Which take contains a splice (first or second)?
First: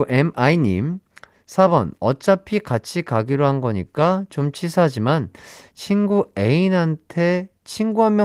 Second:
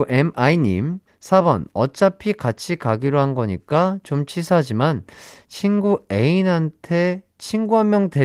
second